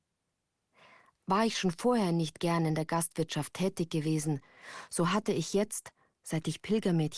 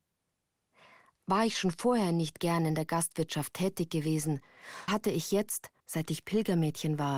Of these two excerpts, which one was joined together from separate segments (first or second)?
second